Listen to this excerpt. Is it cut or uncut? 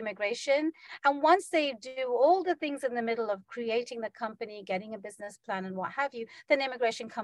uncut